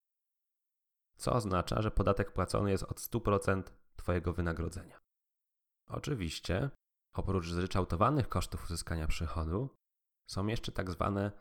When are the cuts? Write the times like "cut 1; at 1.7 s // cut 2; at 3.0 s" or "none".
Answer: none